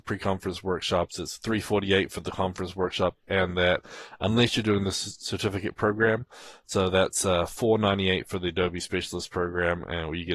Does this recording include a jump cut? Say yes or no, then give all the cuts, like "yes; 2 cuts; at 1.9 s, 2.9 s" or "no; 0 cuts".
no; 0 cuts